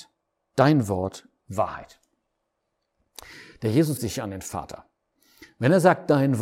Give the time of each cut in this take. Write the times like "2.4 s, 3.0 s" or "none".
1.4 s, 4.0 s